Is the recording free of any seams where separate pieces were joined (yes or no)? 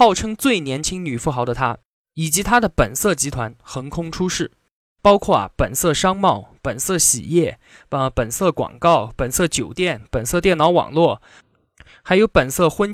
yes